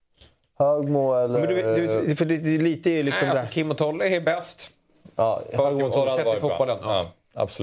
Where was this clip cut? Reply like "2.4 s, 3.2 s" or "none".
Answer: none

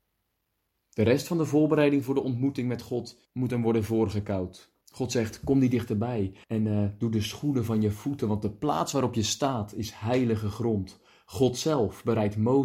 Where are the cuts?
3.2 s, 4.8 s, 6.4 s

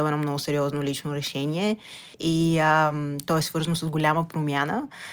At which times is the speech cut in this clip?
2.1 s

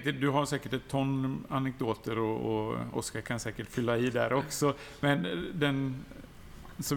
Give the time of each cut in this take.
none

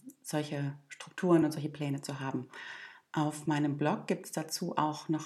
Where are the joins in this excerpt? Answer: none

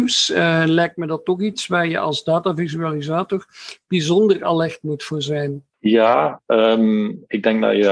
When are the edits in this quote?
5.7 s

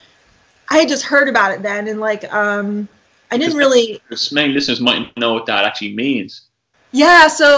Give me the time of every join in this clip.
none

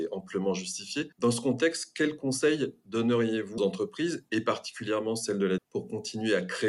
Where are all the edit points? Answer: 1.1 s, 3.6 s, 5.6 s

